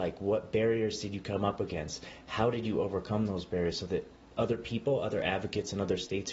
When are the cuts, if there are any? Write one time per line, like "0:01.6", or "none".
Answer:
none